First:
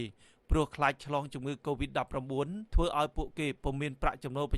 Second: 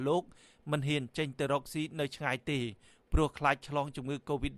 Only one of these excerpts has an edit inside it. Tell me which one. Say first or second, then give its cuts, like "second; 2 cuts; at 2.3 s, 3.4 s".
first; 1 cut; at 2.7 s